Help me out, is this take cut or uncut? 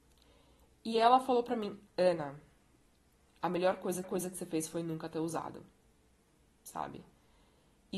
cut